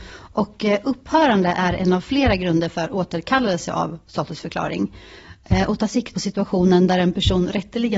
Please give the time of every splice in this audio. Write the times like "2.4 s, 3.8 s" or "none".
6.1 s